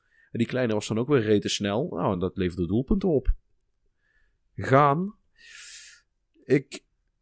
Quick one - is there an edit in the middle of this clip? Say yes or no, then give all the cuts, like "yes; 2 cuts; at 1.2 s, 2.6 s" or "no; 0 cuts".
no; 0 cuts